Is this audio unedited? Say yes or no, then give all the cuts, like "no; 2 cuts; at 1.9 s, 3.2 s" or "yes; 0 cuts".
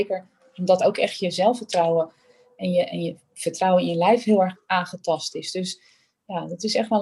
yes; 0 cuts